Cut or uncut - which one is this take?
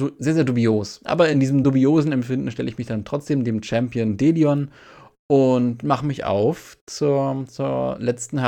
uncut